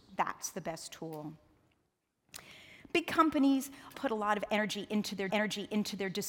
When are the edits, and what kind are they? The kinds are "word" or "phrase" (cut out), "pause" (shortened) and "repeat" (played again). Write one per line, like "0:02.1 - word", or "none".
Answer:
0:03.9 - word
0:05.3 - repeat